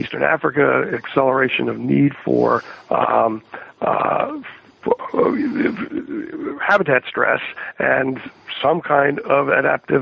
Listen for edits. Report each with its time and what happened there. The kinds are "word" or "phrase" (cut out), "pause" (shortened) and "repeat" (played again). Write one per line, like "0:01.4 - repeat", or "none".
none